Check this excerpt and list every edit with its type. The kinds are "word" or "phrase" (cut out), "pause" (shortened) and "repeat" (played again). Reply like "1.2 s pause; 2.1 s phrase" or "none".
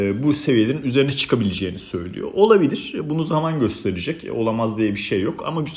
none